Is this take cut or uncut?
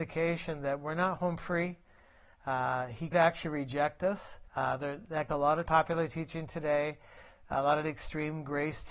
cut